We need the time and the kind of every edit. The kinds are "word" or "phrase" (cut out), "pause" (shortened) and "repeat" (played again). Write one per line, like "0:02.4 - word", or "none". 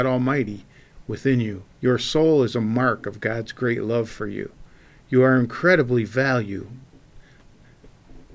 0:01.7 - pause